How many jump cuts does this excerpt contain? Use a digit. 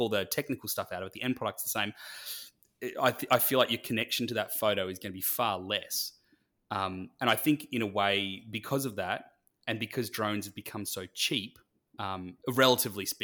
0